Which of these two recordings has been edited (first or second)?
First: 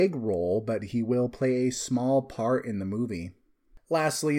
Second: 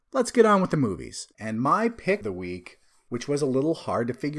second